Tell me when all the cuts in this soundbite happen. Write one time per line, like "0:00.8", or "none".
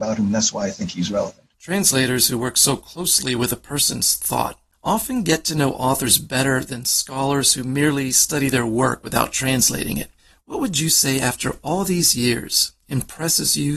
0:01.5